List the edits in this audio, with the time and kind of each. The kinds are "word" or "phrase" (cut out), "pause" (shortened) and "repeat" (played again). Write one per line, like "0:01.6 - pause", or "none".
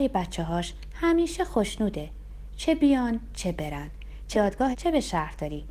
0:04.3 - word
0:04.7 - word